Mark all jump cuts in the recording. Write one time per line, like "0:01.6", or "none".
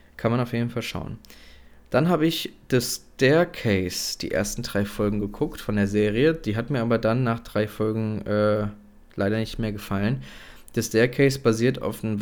none

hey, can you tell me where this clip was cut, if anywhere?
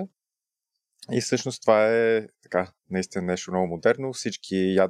none

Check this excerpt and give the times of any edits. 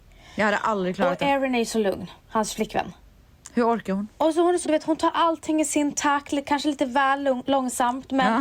0:02.2
0:04.6

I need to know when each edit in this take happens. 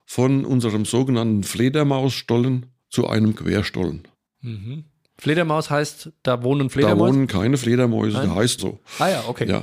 0:02.8
0:04.1
0:08.6

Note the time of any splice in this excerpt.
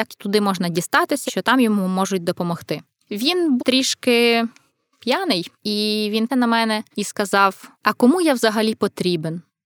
0:01.3
0:03.6
0:05.5
0:06.3
0:06.9
0:07.7

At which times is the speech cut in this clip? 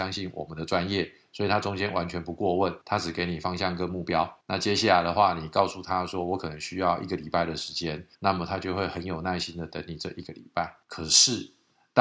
0:02.8
0:04.4
0:08.1
0:10.8

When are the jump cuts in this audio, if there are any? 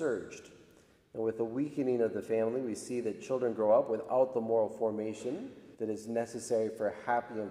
0:05.7

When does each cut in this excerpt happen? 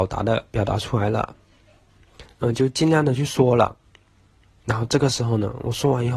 none

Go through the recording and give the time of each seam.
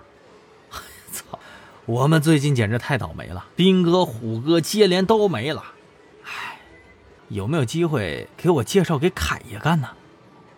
0:01.4
0:03.5
0:07.2
0:08.3

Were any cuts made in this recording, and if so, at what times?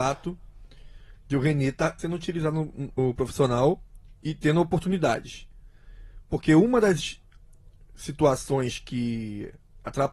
0:02.0
0:03.0

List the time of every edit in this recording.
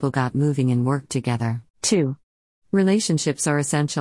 0:01.7

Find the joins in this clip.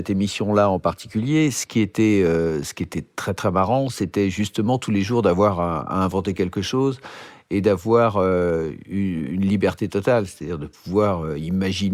none

